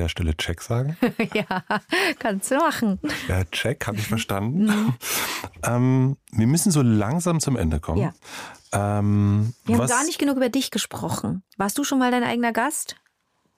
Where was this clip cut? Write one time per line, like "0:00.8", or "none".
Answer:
0:09.6
0:11.5